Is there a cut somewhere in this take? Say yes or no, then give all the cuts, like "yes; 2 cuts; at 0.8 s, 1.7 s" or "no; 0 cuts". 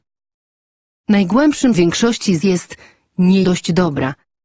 yes; 3 cuts; at 1.7 s, 2.4 s, 3.4 s